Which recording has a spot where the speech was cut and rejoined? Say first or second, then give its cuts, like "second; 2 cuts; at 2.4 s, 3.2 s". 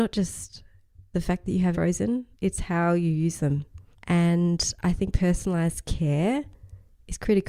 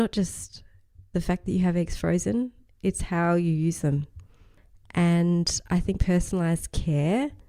first; 3 cuts; at 1.7 s, 2.3 s, 3.9 s